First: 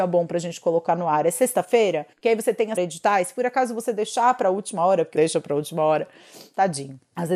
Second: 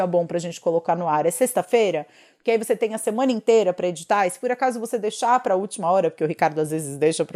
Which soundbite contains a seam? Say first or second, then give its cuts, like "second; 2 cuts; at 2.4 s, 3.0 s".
first; 3 cuts; at 2.1 s, 2.8 s, 5.1 s